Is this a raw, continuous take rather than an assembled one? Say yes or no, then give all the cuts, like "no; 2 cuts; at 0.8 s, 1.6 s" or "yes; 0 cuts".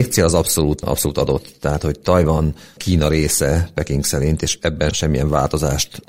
no; 1 cut; at 4.9 s